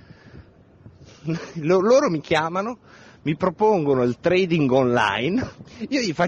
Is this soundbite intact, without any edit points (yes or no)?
yes